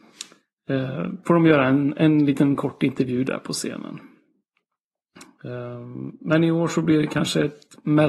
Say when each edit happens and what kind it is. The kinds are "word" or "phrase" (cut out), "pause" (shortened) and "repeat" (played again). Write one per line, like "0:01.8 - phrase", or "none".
none